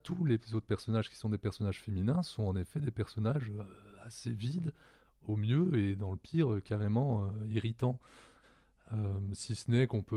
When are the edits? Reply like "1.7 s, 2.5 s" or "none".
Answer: none